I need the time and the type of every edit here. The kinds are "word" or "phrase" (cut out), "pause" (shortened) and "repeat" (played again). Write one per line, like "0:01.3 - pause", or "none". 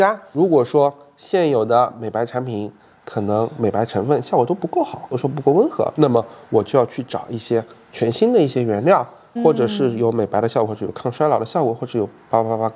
0:06.0 - word
0:09.4 - word